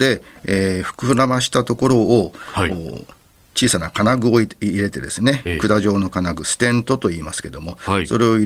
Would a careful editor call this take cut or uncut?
uncut